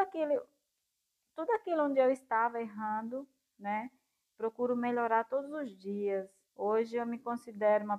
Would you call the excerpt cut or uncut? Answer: cut